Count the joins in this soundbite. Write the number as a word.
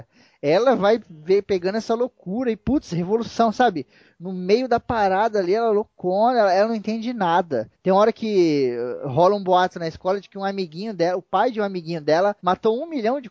two